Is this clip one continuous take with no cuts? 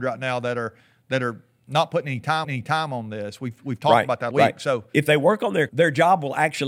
no; 3 cuts; at 2.4 s, 4.3 s, 5.7 s

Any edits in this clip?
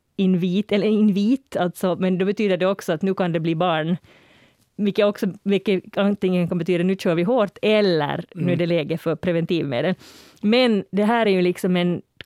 no; 0 cuts

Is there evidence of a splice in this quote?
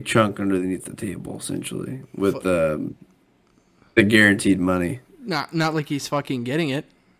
no; 0 cuts

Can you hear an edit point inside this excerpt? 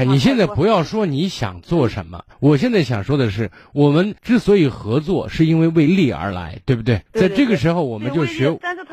yes; 3 cuts; at 2.3 s, 4.2 s, 7.1 s

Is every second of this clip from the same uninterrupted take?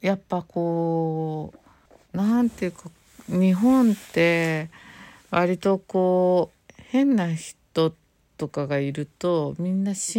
no; 1 cut; at 1.9 s

